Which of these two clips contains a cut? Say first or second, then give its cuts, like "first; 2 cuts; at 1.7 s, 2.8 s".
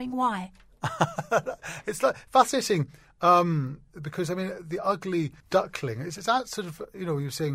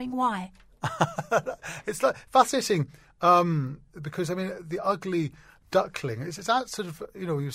first; 1 cut; at 5.4 s